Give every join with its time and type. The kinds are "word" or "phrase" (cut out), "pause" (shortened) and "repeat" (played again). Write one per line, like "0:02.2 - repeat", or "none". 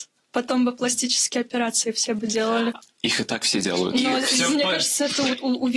none

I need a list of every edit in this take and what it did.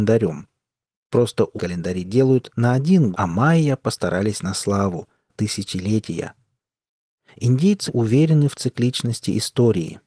0:01.6 - word
0:03.1 - word
0:05.3 - word
0:07.9 - word

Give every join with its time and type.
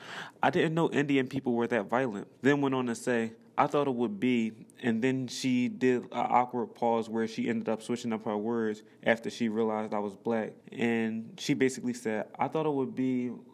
0:02.4 - pause
0:10.6 - pause

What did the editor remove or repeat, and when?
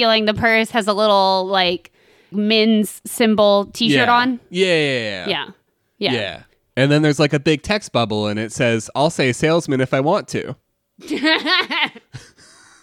0:02.3 - word

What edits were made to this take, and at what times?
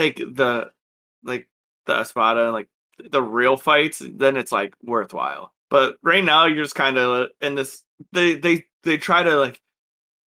0:05.6 - pause
0:08.7 - pause

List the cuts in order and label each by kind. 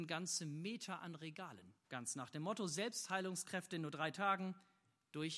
0:01.8 - pause

